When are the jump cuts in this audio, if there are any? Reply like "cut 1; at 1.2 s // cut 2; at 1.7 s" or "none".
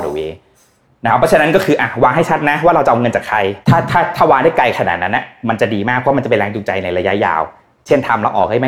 cut 1; at 3.6 s